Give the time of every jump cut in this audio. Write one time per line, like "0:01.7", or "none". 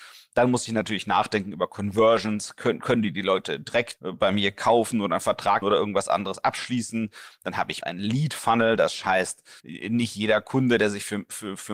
0:04.0
0:05.6
0:07.8
0:09.6